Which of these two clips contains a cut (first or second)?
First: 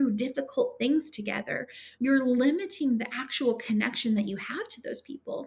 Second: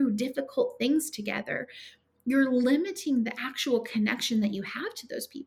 first